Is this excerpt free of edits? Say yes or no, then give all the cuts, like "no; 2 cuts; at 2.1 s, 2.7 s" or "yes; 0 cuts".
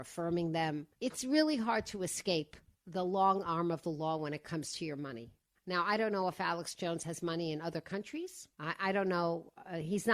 no; 4 cuts; at 0.9 s, 2.7 s, 5.5 s, 8.5 s